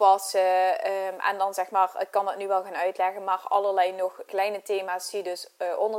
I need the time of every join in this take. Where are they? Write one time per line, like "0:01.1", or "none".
0:04.3